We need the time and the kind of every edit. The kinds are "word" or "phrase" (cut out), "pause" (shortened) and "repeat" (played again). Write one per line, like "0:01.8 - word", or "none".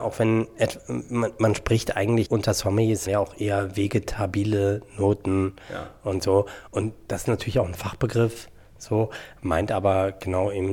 0:02.3 - word
0:03.1 - phrase
0:06.7 - pause